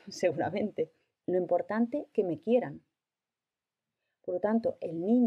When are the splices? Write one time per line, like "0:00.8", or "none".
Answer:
0:01.1
0:02.1